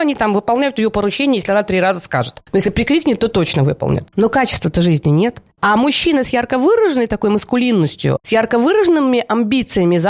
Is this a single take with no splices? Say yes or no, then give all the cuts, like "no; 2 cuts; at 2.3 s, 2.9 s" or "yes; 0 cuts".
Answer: yes; 0 cuts